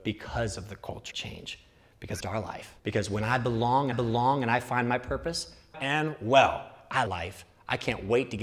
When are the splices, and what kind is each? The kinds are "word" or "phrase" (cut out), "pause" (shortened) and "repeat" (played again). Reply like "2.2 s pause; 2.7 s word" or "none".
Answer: 1.1 s word; 2.2 s phrase; 2.8 s pause; 3.9 s repeat; 5.7 s phrase; 7.1 s word

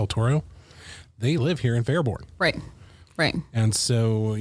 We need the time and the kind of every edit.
none

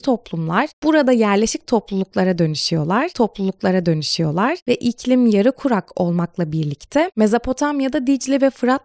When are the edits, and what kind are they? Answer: 3.1 s repeat

